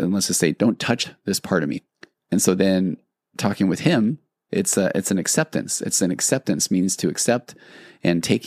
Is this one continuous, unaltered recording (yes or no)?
yes